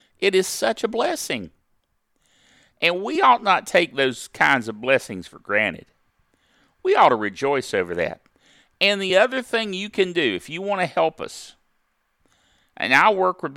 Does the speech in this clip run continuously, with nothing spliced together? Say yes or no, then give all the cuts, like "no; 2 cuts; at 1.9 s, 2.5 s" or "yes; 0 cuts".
yes; 0 cuts